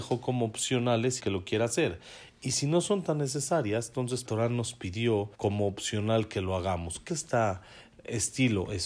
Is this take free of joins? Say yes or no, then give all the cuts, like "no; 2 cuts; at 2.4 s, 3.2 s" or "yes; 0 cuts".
no; 4 cuts; at 1.2 s, 4.2 s, 5.3 s, 7.1 s